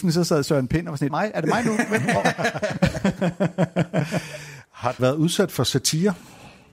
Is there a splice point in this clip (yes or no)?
yes